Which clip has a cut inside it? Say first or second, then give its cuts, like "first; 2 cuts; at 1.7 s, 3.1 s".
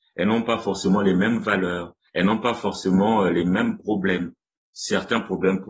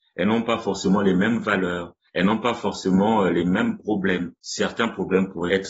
second; 1 cut; at 4.4 s